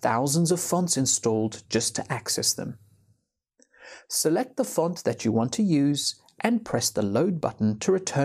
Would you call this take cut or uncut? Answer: uncut